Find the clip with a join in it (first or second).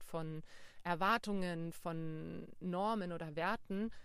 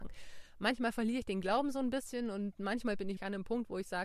second